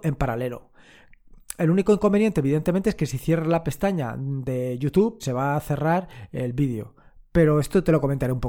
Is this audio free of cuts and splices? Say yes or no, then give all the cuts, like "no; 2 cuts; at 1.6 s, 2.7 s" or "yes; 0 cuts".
no; 1 cut; at 5.2 s